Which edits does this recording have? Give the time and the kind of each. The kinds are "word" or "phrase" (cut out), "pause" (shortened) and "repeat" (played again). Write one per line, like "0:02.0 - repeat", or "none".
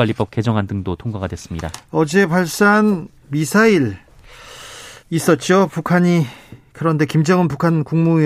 0:05.0 - pause